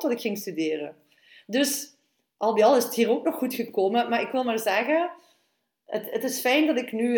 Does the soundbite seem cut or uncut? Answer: uncut